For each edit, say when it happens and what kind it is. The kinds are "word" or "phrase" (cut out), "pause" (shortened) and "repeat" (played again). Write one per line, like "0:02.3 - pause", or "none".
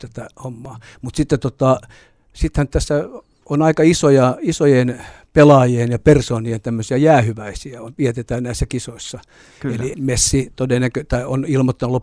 0:07.9 - word
0:09.9 - word